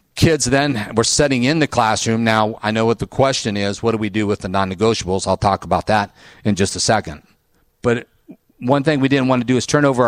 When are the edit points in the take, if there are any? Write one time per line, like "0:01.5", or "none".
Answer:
none